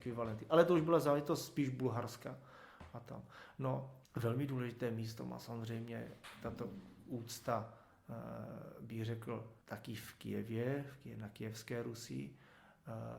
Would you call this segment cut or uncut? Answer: cut